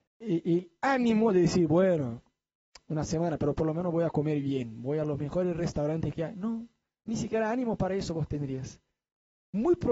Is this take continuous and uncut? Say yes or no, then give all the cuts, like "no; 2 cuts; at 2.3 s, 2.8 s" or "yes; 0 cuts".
yes; 0 cuts